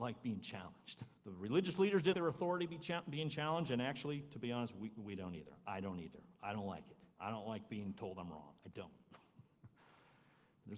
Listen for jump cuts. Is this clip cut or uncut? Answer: cut